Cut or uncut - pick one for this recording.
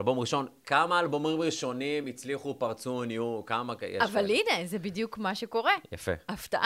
uncut